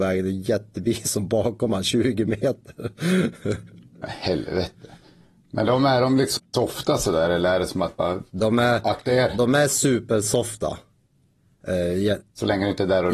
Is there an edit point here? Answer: no; 0 cuts

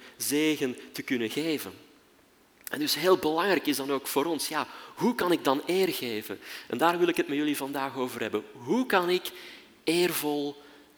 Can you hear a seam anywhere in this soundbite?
no; 0 cuts

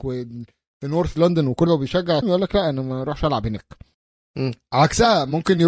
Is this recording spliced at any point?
yes; 3 cuts; at 1.7 s, 2.2 s, 3.9 s

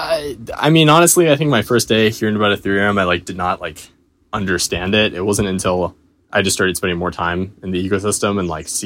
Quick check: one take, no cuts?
yes; 0 cuts

